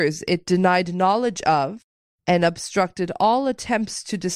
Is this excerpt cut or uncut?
uncut